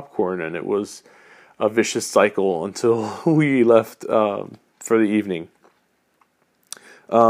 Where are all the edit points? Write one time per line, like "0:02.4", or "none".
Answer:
none

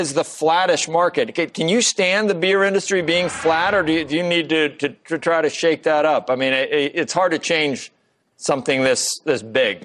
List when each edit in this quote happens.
none

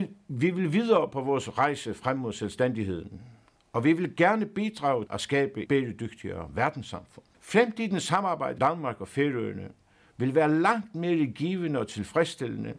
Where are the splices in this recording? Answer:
0:05.1
0:05.7
0:07.3
0:08.6

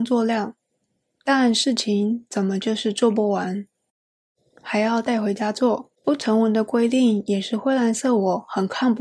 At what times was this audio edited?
0:06.0

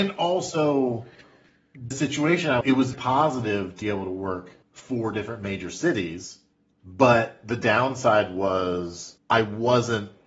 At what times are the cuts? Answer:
0:01.9
0:02.6
0:02.9
0:03.8
0:04.6
0:06.5

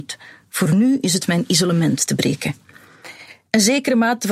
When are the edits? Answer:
0:01.2

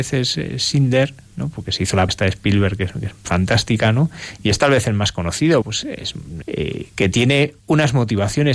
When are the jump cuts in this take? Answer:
0:02.1
0:05.6
0:06.4
0:06.9
0:07.6

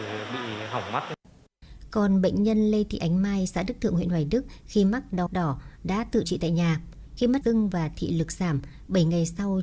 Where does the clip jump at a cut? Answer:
0:05.3
0:06.2
0:07.4

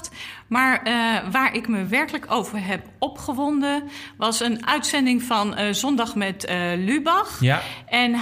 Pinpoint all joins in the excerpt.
none

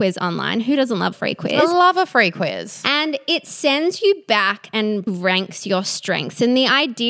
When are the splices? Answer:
0:01.1
0:05.1

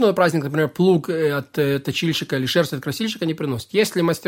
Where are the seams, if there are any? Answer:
none

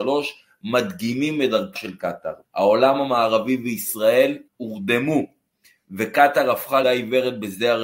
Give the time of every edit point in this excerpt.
0:01.8
0:02.4
0:04.5
0:06.8

